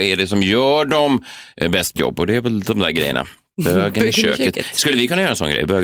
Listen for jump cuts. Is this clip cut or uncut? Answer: cut